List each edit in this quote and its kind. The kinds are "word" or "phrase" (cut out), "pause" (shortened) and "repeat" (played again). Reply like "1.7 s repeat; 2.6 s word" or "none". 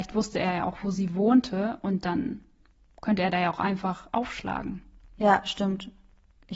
none